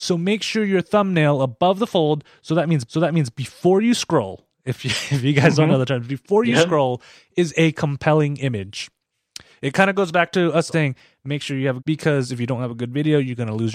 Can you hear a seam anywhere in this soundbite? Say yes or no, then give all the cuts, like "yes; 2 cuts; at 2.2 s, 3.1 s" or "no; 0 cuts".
yes; 4 cuts; at 2.9 s, 4.5 s, 10.7 s, 11.8 s